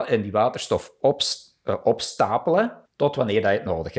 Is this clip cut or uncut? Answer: cut